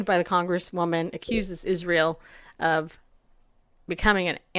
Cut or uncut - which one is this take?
uncut